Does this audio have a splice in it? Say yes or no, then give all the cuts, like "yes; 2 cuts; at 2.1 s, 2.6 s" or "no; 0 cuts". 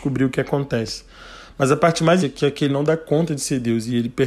yes; 2 cuts; at 2.2 s, 2.7 s